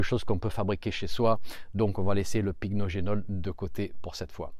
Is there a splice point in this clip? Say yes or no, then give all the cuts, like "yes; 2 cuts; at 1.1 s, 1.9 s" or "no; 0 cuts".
no; 0 cuts